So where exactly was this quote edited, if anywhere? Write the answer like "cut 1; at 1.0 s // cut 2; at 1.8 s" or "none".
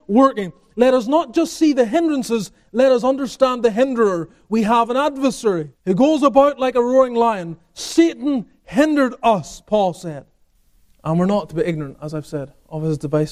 cut 1; at 5.8 s // cut 2; at 10.5 s

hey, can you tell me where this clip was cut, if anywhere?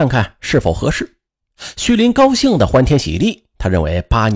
cut 1; at 1.3 s

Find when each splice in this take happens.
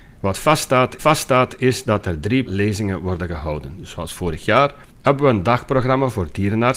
cut 1; at 1.0 s // cut 2; at 2.5 s // cut 3; at 4.9 s

